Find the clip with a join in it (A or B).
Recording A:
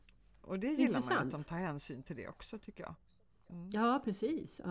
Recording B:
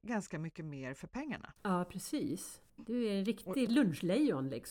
B